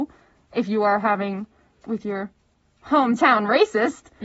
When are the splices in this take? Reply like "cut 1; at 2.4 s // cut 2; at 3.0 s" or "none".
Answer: cut 1; at 1.8 s